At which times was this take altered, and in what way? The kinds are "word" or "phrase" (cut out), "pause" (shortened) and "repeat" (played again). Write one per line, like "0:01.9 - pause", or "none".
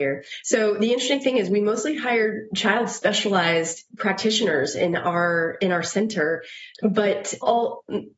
0:03.9 - pause